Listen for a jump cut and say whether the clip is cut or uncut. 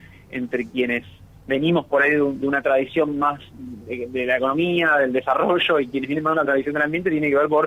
uncut